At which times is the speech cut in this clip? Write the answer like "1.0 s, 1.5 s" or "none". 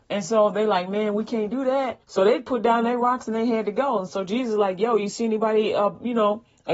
2.0 s